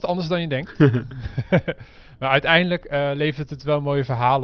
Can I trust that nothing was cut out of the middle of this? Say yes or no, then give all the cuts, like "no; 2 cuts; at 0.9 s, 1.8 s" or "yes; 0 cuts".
yes; 0 cuts